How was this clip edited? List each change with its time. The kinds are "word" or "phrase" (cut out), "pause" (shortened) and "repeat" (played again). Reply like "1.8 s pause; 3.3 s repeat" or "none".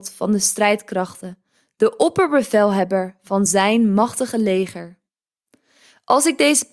none